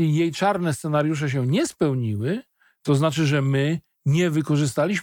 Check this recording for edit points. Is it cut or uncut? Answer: uncut